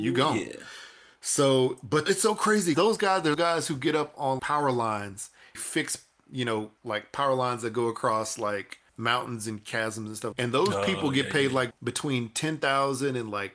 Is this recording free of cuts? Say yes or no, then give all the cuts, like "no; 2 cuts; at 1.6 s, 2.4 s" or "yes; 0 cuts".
no; 9 cuts; at 2.1 s, 2.7 s, 3.3 s, 4.4 s, 5.5 s, 6.8 s, 8.9 s, 10.3 s, 11.7 s